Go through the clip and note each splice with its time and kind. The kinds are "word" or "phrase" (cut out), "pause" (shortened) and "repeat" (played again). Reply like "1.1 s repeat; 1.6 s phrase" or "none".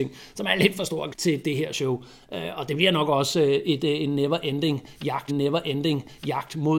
1.1 s word; 5.3 s repeat